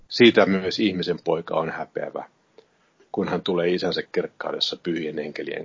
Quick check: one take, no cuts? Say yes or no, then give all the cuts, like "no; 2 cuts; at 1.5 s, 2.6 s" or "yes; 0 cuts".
yes; 0 cuts